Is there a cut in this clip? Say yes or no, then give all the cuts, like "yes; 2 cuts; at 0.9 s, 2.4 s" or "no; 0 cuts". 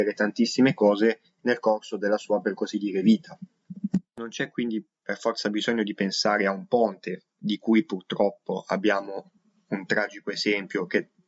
no; 0 cuts